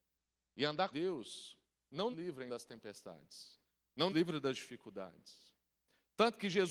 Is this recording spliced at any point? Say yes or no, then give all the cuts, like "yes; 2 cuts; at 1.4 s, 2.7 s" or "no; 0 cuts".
yes; 4 cuts; at 0.9 s, 2.1 s, 2.5 s, 4.1 s